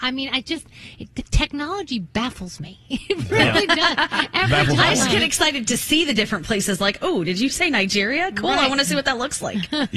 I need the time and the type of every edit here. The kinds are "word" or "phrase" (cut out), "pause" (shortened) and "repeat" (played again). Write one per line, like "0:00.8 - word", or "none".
none